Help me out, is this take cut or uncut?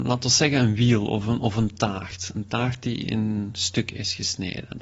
uncut